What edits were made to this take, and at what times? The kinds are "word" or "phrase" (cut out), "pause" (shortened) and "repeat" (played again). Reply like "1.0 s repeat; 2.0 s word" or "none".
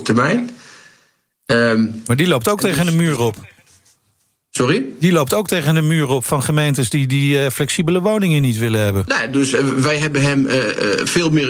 none